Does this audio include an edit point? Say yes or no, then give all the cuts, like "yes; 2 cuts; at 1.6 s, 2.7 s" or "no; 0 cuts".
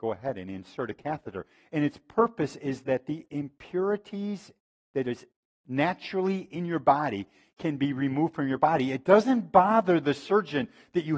no; 0 cuts